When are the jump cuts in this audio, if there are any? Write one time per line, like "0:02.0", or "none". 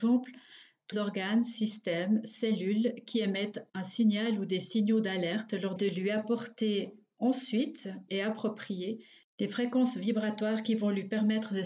0:00.9
0:03.7
0:05.8
0:08.1